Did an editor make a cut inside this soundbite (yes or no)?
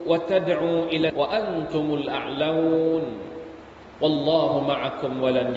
yes